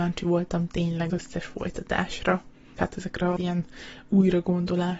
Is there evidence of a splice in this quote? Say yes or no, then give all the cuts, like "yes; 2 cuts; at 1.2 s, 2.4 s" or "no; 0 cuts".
yes; 3 cuts; at 1.1 s, 2.8 s, 3.4 s